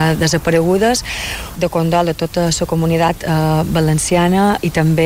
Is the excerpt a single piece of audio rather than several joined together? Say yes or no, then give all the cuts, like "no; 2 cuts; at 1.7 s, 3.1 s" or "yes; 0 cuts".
no; 1 cut; at 1.5 s